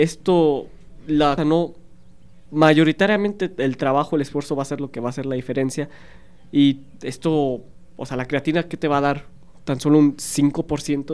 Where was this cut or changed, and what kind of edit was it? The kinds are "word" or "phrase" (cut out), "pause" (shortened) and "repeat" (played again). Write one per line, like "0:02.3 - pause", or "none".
0:01.4 - word